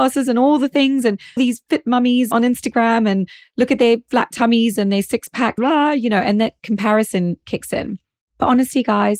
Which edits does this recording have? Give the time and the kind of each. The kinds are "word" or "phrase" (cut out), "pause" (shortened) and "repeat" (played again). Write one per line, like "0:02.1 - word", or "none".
0:01.4 - word
0:05.6 - word